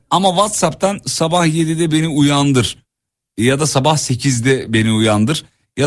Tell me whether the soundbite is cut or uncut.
uncut